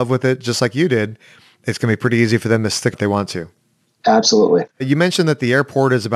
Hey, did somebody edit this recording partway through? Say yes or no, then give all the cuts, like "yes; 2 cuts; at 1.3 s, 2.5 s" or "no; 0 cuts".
yes; 2 cuts; at 2.9 s, 4.7 s